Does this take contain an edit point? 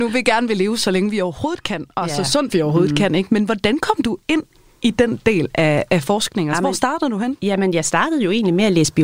no; 0 cuts

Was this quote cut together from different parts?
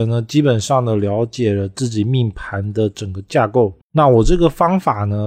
yes; 1 cut; at 3.8 s

